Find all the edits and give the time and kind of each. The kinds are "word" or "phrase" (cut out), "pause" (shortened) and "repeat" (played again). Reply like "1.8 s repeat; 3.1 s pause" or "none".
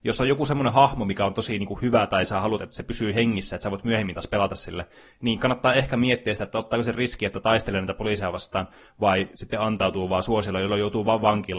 none

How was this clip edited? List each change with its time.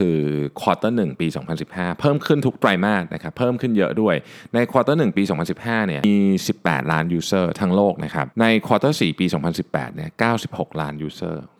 8.3 s pause

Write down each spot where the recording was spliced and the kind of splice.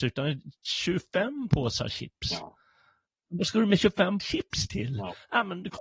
4.2 s word

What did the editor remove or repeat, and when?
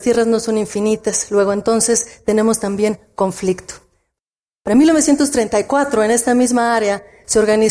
none

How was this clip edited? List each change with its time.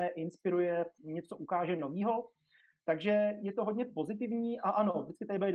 none

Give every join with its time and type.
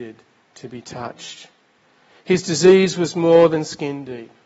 none

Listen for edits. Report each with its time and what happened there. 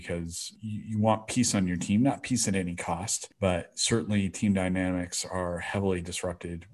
none

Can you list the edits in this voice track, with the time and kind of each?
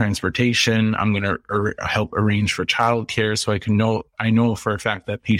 none

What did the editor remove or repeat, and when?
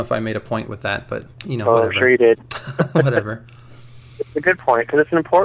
1.3 s pause

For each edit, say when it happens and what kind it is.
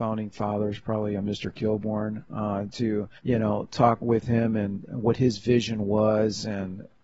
2.7 s word; 3.2 s pause; 4.0 s word; 4.9 s phrase

